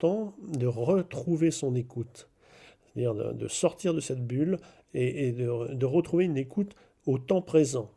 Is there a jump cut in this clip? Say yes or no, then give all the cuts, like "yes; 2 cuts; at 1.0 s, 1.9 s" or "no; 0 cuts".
no; 0 cuts